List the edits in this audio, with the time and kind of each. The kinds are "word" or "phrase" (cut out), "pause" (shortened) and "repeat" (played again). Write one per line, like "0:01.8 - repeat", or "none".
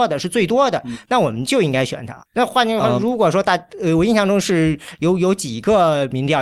0:02.3 - pause